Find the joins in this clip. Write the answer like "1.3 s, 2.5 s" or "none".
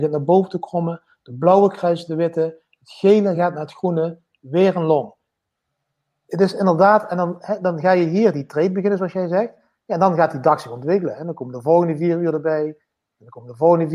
none